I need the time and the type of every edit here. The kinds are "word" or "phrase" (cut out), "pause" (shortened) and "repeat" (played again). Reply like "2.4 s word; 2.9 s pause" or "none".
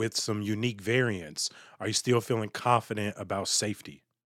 none